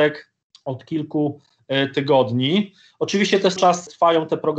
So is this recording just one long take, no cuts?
no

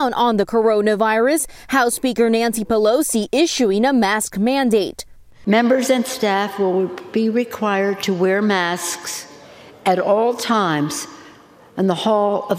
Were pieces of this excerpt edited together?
no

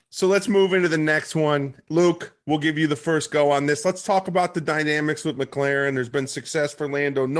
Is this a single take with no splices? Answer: yes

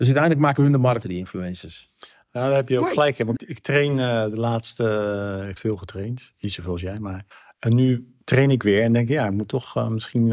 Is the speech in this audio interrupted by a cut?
yes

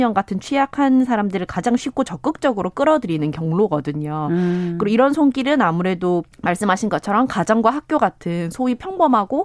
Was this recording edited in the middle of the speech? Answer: yes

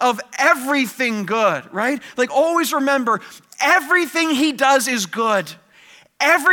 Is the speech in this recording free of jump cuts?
yes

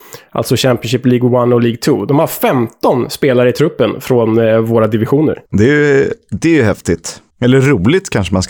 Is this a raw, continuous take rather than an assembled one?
no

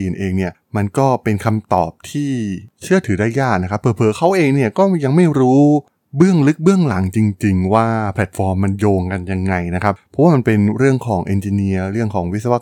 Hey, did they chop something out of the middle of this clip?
no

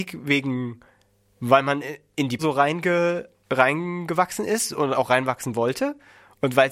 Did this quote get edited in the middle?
yes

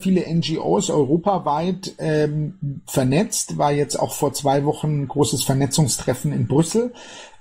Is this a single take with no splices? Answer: yes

